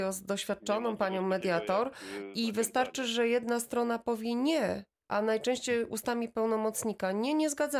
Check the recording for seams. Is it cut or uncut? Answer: uncut